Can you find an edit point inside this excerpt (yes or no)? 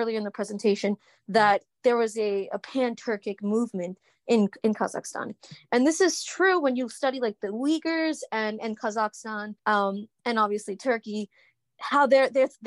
yes